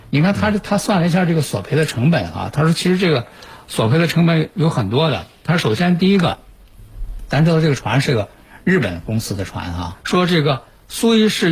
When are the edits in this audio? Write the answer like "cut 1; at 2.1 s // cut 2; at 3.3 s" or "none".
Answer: cut 1; at 9.9 s